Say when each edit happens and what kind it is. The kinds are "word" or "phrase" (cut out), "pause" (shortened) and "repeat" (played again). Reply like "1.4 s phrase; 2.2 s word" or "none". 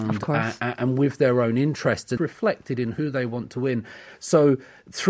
2.2 s word